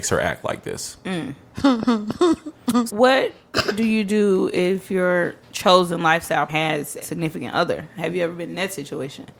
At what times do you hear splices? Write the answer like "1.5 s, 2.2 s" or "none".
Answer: 2.9 s, 5.4 s, 6.5 s, 7.0 s